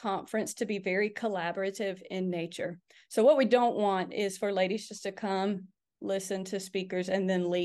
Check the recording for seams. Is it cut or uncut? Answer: uncut